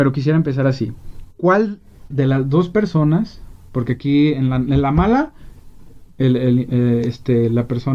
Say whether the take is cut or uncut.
cut